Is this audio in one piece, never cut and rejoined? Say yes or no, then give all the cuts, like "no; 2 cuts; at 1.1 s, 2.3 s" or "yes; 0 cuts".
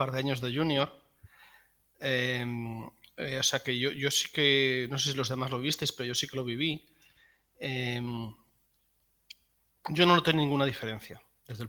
yes; 0 cuts